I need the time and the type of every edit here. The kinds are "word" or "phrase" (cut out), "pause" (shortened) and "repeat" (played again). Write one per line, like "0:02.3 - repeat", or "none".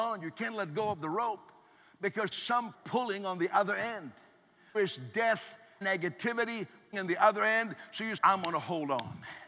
0:02.3 - word
0:02.7 - word
0:04.7 - word
0:05.8 - word
0:06.9 - word
0:08.2 - word